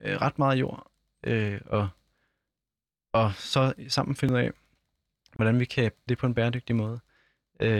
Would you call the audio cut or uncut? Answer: cut